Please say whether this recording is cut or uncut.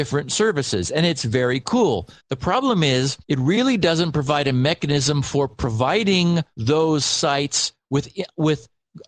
cut